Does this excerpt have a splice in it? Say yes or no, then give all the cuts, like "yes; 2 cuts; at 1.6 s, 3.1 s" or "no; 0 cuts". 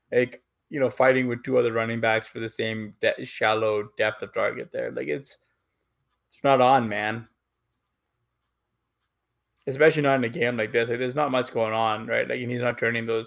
no; 0 cuts